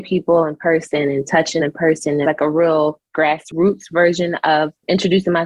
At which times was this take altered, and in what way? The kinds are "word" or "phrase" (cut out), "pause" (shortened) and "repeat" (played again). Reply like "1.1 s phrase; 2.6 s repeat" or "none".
1.6 s word; 2.2 s word